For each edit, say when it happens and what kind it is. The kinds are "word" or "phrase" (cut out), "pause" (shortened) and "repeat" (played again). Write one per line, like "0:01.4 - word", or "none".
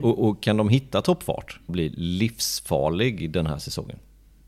0:01.7 - phrase